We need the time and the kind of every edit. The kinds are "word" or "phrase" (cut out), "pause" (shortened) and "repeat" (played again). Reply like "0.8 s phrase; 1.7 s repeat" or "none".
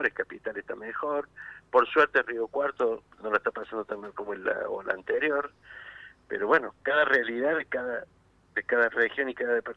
3.1 s word